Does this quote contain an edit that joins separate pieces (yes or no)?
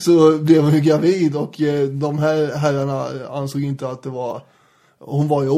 no